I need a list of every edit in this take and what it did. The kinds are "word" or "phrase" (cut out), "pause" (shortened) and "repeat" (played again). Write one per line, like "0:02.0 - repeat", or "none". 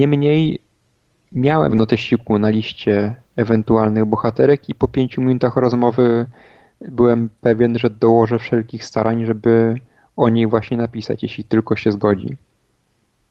0:01.7 - word